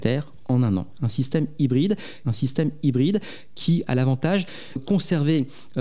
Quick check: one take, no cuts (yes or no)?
no